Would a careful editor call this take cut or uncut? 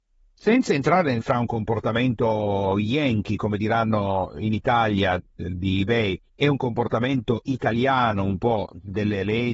cut